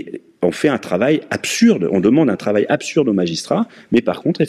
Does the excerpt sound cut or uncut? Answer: uncut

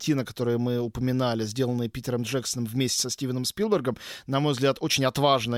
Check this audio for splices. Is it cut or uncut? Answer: uncut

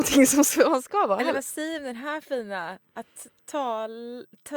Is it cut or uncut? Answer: uncut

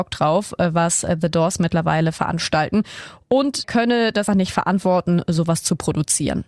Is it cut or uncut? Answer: cut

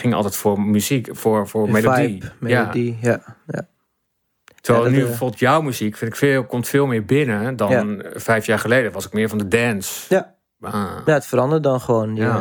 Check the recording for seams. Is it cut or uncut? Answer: uncut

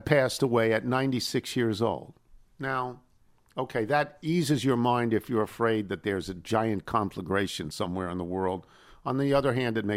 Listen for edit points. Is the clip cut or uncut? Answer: uncut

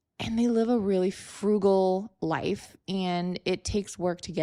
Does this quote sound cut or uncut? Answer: uncut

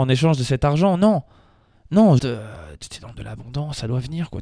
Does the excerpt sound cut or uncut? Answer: cut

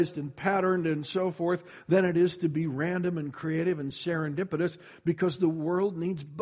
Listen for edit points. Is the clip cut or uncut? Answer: uncut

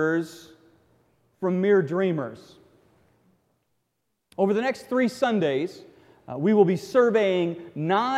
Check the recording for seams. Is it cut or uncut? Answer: uncut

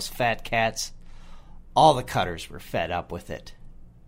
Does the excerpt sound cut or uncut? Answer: uncut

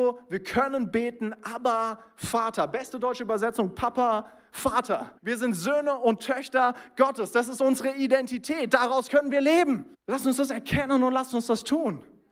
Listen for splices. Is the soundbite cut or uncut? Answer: cut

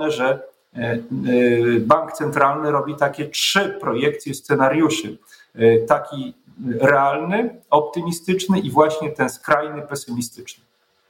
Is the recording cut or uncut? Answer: uncut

